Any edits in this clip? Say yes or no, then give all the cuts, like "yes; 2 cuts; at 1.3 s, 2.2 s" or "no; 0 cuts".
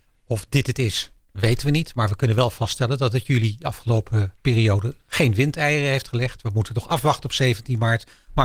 yes; 1 cut; at 4.4 s